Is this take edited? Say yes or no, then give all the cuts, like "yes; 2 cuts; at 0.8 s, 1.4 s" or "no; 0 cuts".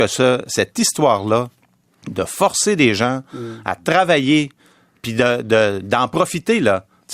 no; 0 cuts